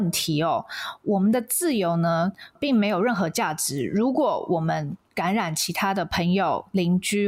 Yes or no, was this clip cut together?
yes